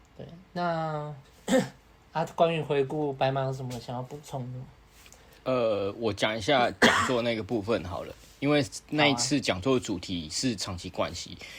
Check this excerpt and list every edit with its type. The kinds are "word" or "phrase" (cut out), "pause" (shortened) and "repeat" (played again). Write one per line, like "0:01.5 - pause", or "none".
0:01.2 - pause

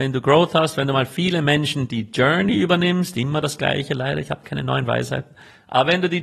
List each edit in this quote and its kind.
none

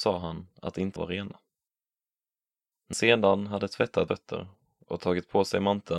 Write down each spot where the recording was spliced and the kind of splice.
0:01.0 - word
0:02.9 - word
0:04.1 - word

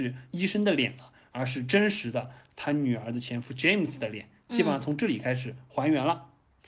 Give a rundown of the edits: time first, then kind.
none

